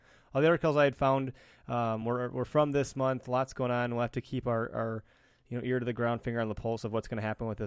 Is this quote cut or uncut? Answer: uncut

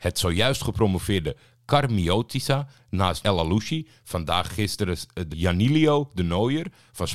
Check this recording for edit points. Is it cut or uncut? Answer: cut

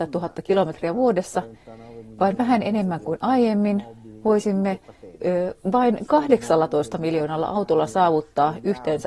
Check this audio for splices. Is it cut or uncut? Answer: uncut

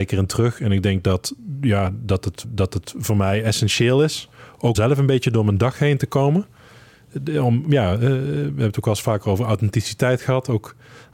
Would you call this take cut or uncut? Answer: cut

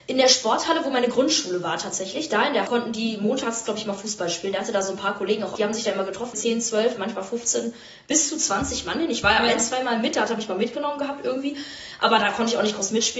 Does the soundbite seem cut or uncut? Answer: cut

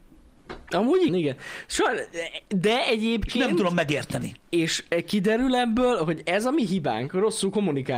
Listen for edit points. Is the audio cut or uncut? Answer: cut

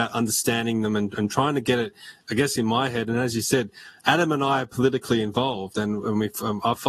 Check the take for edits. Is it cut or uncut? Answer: uncut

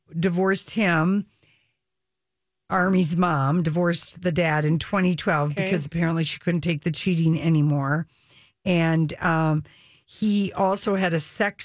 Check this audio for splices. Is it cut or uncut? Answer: uncut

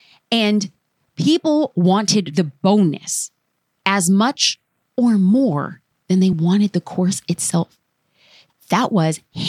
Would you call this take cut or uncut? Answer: uncut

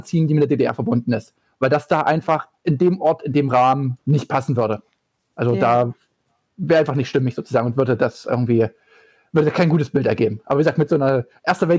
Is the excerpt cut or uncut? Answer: cut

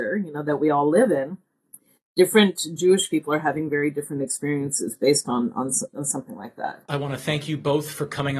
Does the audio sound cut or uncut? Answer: uncut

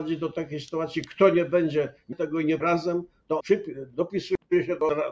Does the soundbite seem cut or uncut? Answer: cut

